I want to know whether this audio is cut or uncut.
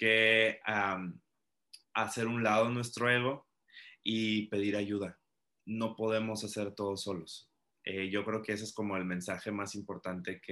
cut